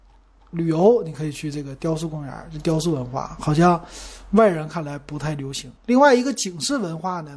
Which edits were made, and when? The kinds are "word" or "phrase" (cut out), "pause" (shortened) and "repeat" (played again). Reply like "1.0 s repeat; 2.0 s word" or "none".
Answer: 5.8 s pause

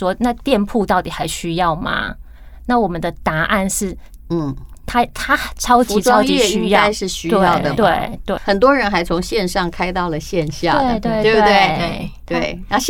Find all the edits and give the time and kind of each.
8.4 s word

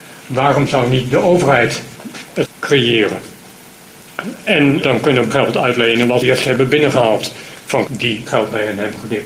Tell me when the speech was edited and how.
2.4 s word; 4.8 s word; 5.3 s word; 6.2 s word; 7.9 s word; 8.3 s word

